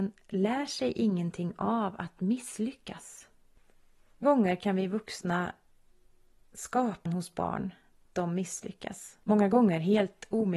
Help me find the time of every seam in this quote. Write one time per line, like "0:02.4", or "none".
0:04.2
0:07.1
0:08.1
0:09.2